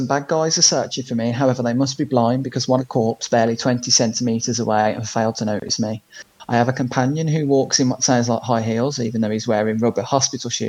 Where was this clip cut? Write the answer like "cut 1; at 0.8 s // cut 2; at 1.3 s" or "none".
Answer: cut 1; at 2.8 s